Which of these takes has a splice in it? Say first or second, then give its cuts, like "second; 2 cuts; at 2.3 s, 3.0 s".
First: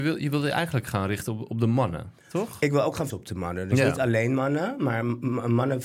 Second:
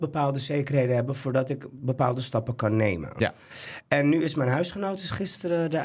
first; 1 cut; at 3.1 s